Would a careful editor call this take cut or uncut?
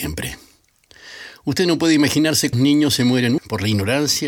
cut